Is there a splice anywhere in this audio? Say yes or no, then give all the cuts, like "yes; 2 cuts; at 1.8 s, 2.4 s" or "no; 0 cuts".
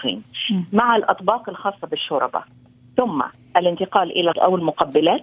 yes; 1 cut; at 4.3 s